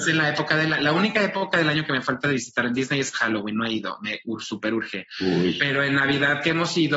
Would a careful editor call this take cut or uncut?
uncut